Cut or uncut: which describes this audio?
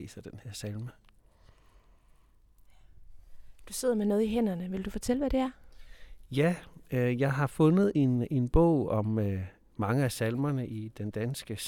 uncut